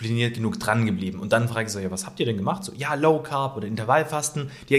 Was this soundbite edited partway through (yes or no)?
no